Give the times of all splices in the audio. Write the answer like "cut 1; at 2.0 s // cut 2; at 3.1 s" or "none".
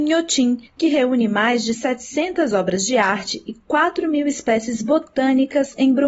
none